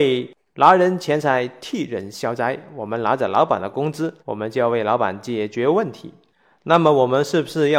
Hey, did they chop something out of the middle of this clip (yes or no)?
yes